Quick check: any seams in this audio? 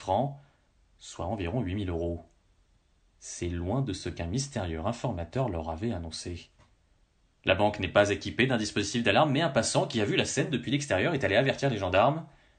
no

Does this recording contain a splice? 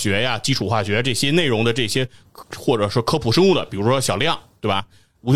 no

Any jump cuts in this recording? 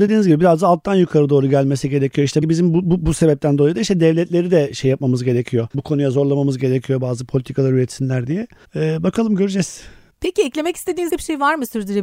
yes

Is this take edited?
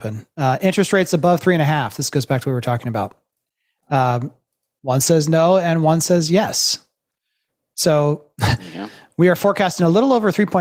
no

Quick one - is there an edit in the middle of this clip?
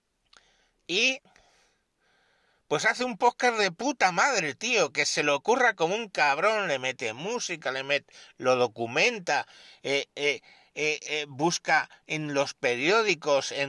no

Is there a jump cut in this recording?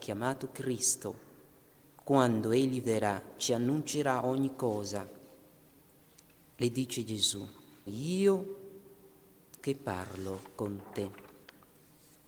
yes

